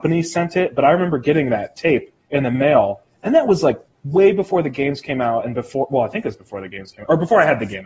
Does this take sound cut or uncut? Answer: cut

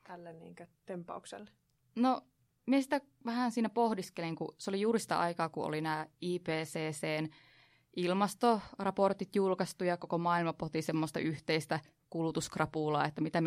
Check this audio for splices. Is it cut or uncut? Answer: uncut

